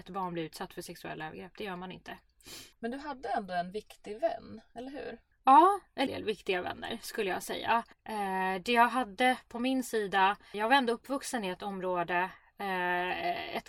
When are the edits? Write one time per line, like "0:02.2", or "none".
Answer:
0:02.7
0:05.3
0:06.1
0:07.9
0:10.5